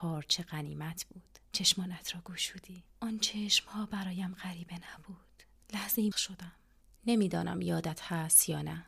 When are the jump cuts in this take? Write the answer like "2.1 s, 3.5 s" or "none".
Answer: 1.4 s, 2.9 s, 6.1 s